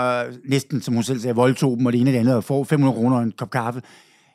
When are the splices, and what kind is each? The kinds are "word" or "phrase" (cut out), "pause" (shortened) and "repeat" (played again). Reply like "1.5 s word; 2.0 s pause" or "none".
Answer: none